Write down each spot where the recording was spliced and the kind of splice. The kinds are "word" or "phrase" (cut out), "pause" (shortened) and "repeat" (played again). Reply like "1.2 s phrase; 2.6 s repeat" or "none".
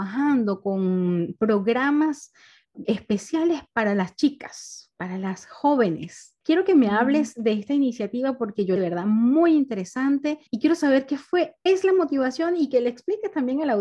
2.8 s word; 6.4 s pause; 8.8 s phrase; 10.5 s pause; 11.7 s word

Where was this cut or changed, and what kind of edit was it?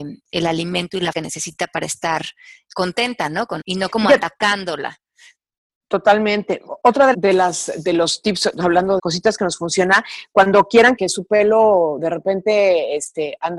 1.1 s word; 2.7 s word; 3.6 s word; 7.1 s word; 9.0 s word; 11.0 s word

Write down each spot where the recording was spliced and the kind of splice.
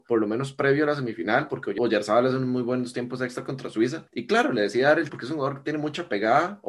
5.1 s word

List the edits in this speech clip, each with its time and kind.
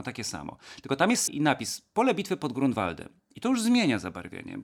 1.3 s word

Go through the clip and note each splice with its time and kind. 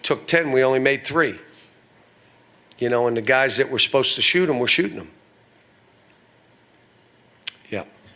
none

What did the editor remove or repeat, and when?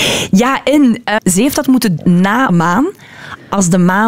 1.2 s word; 2.0 s word; 2.5 s word

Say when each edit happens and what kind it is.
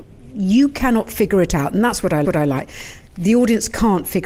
2.2 s repeat

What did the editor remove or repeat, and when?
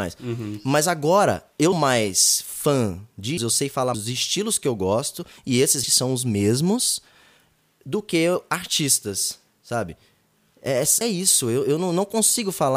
1.7 s word; 3.4 s word; 3.9 s word; 5.8 s word; 11.0 s word

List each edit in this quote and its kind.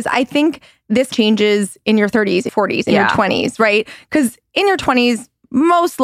1.1 s word; 2.5 s word

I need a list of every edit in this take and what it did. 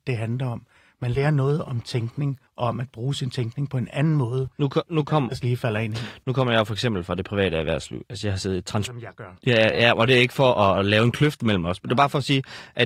2.5 s pause

